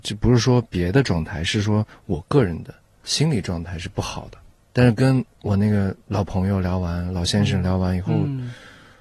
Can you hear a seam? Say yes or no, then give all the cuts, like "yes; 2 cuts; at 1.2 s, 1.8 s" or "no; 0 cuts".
no; 0 cuts